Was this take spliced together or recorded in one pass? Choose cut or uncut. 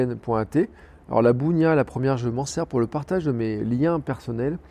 uncut